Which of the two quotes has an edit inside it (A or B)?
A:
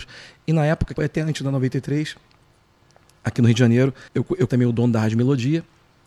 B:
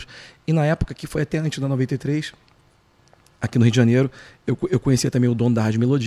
A